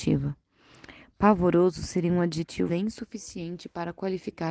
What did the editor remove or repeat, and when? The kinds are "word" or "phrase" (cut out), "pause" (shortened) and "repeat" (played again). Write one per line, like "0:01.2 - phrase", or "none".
0:02.7 - word